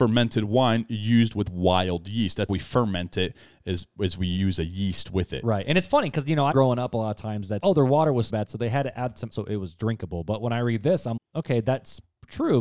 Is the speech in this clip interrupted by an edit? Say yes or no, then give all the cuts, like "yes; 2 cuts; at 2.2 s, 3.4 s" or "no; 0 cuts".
yes; 6 cuts; at 2.5 s, 6.5 s, 7.6 s, 8.3 s, 9.3 s, 11.2 s